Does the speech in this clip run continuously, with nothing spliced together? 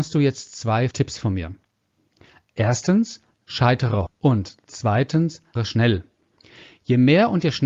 no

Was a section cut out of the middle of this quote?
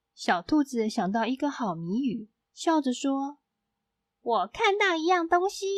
yes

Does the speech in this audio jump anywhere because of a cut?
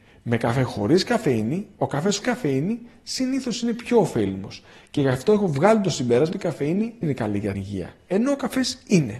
yes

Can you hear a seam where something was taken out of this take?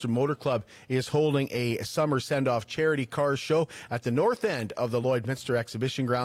no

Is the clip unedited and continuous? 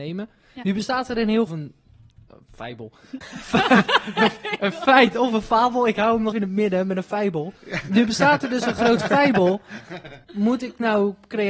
no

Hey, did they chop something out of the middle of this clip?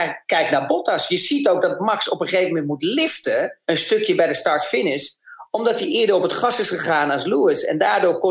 yes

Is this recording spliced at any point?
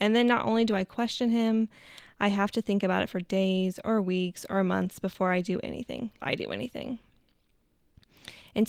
yes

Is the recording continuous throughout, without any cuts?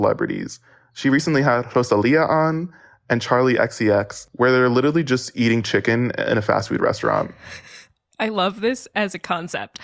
yes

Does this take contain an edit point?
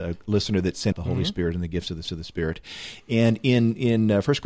yes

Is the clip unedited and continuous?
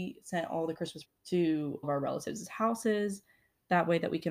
no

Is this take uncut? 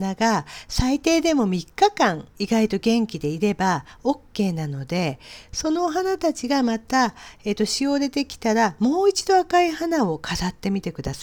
no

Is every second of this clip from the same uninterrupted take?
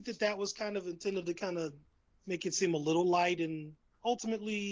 no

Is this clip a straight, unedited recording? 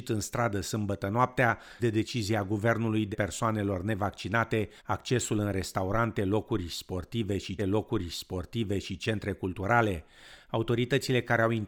no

